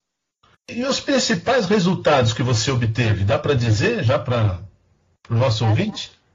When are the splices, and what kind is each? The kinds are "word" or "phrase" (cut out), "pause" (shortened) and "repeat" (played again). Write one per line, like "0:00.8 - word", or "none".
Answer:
none